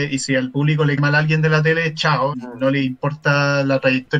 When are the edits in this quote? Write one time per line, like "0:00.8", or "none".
0:01.0
0:02.3